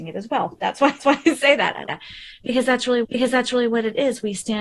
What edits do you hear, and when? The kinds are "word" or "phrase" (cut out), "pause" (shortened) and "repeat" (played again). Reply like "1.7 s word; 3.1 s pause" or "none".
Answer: 1.0 s repeat; 1.9 s word; 3.0 s repeat